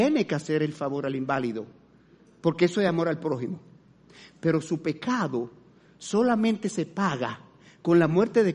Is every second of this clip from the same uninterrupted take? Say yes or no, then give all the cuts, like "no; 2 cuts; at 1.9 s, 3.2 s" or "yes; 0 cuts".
yes; 0 cuts